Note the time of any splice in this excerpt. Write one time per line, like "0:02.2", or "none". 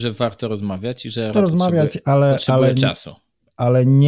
0:01.3